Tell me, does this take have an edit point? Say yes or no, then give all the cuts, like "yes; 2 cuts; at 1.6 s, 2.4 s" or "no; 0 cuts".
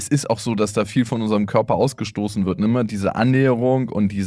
no; 0 cuts